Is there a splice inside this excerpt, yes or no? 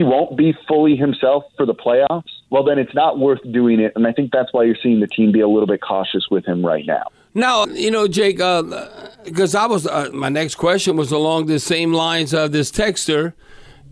yes